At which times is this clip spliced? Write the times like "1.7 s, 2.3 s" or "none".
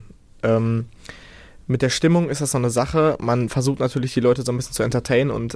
none

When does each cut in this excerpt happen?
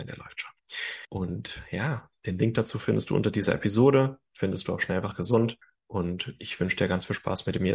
1.0 s, 5.6 s

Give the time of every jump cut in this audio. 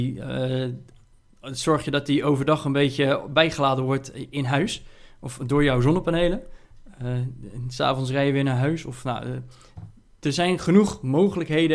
none

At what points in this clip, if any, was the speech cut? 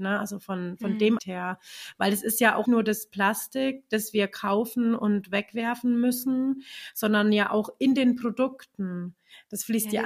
1.2 s, 2.7 s

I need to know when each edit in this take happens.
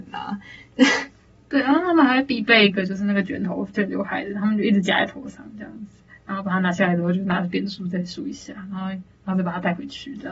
none

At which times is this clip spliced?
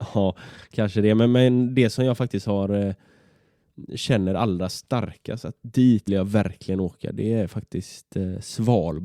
6.1 s

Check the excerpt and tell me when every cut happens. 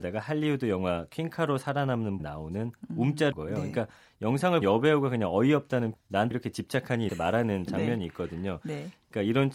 2.2 s, 3.3 s, 4.6 s, 5.9 s, 6.3 s, 7.1 s

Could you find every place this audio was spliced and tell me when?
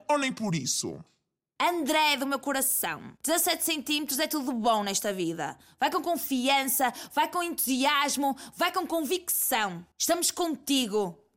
3.2 s, 9.9 s

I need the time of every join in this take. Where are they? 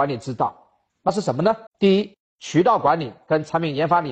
1.7 s

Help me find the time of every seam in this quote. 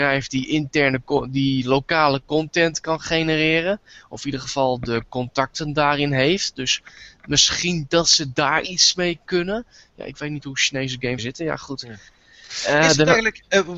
11.2 s

